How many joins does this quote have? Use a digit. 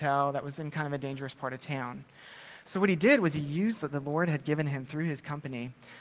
1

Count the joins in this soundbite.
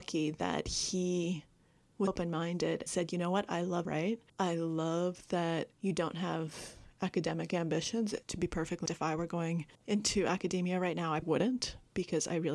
9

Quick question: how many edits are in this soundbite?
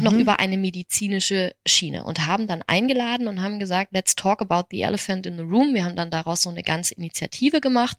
0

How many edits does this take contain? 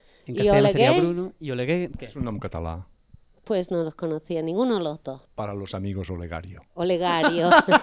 2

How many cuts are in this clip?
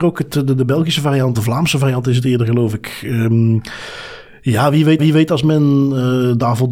2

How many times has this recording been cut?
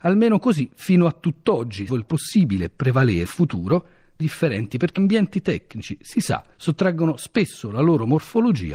5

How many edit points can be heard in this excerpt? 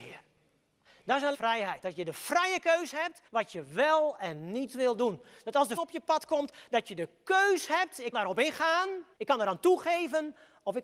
5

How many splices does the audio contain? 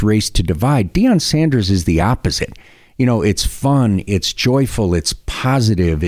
0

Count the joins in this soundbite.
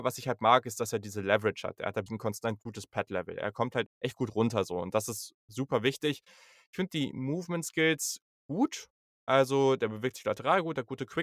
2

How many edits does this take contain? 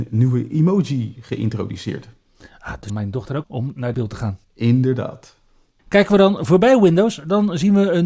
4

